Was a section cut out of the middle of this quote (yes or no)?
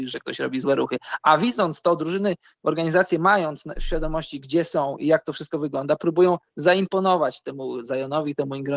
no